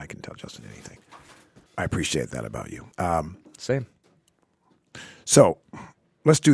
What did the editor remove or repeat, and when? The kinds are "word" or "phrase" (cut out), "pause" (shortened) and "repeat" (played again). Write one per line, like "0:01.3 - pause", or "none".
0:01.7 - pause
0:02.9 - pause